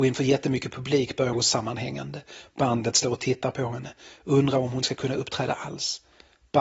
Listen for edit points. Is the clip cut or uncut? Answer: cut